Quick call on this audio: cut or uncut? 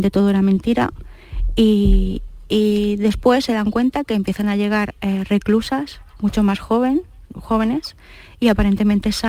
uncut